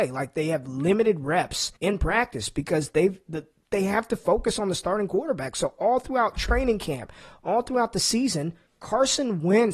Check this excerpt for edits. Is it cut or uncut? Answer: cut